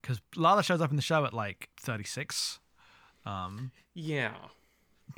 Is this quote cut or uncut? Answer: cut